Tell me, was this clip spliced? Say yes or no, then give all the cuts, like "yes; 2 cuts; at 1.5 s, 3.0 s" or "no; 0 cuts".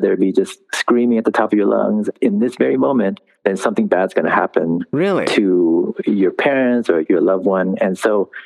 no; 0 cuts